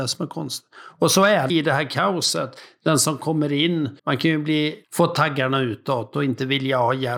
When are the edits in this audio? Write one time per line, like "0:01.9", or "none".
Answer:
0:01.5
0:04.0
0:04.8